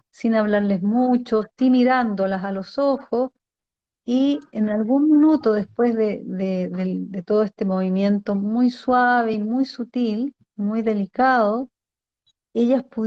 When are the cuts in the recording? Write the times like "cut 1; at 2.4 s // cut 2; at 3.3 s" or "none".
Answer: none